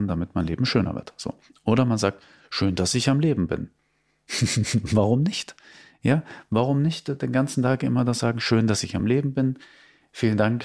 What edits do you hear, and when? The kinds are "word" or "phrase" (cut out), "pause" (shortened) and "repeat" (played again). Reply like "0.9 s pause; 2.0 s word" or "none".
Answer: none